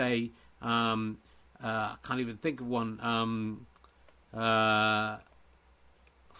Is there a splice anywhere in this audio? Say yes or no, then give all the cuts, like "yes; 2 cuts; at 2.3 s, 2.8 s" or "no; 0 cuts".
no; 0 cuts